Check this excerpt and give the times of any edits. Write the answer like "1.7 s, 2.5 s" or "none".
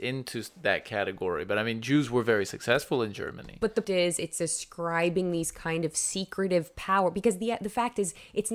3.8 s